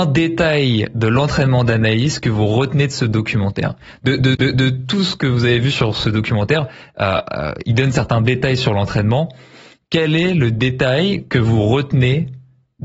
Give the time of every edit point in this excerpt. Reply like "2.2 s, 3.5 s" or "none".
4.3 s